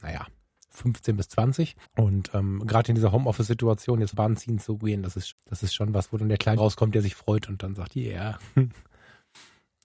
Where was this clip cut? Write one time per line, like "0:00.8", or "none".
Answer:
0:01.8
0:04.1
0:05.3
0:06.6